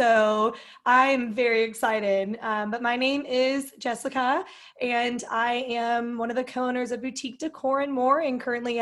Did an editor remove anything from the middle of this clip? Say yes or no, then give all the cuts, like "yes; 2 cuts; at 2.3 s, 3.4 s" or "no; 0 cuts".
no; 0 cuts